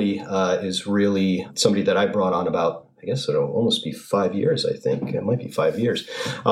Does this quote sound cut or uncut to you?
uncut